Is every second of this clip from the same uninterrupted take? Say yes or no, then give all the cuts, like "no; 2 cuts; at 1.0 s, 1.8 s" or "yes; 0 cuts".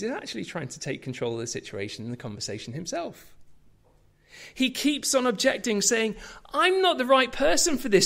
yes; 0 cuts